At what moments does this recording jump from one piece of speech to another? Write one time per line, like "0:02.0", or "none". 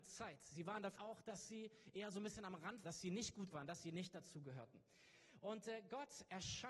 0:01.0
0:02.8
0:03.5